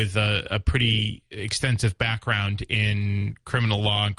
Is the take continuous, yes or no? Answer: yes